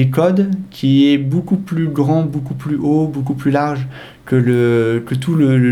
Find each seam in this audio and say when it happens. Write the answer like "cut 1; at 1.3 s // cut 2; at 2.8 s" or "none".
none